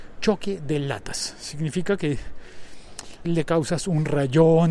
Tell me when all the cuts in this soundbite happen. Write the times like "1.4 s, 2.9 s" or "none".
3.2 s